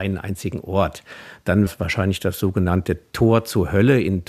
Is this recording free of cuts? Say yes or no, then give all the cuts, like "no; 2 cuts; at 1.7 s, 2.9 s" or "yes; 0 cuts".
no; 1 cut; at 1.7 s